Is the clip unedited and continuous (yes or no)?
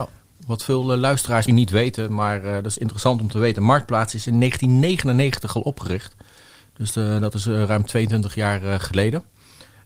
no